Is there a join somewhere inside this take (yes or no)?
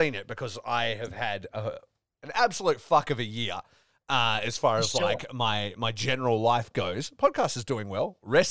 no